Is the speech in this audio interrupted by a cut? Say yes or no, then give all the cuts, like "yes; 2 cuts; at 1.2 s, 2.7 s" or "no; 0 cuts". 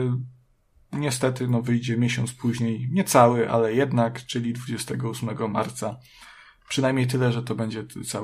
no; 0 cuts